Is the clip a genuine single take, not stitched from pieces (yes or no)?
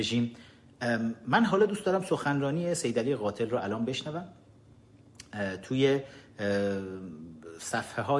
yes